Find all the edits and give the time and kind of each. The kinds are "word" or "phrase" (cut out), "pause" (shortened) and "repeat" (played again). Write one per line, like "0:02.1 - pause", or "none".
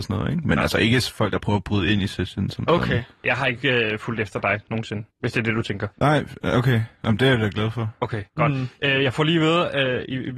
0:05.1 - pause
0:05.9 - pause
0:08.3 - pause